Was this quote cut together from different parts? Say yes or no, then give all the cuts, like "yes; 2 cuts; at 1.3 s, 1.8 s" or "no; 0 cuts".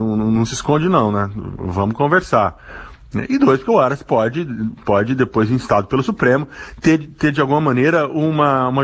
no; 0 cuts